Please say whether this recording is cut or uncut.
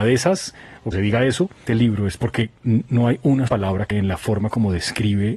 cut